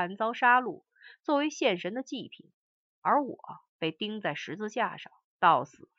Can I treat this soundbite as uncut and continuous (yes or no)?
yes